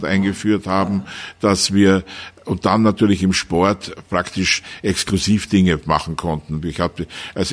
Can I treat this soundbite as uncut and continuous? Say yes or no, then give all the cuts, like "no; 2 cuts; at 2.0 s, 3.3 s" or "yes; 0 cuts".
yes; 0 cuts